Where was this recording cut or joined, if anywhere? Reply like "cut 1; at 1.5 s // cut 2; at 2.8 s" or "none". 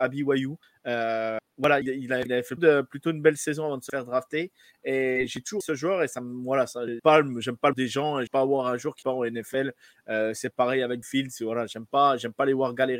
cut 1; at 1.8 s // cut 2; at 2.3 s // cut 3; at 2.6 s // cut 4; at 5.6 s // cut 5; at 7.0 s // cut 6; at 7.7 s // cut 7; at 8.3 s // cut 8; at 9.0 s // cut 9; at 11.0 s